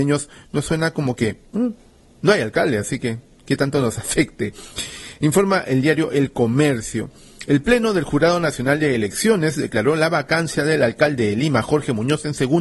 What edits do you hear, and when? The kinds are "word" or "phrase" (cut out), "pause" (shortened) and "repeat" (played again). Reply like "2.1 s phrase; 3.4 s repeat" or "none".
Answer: none